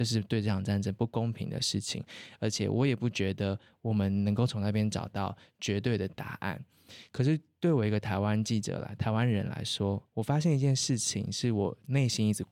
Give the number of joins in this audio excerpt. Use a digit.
1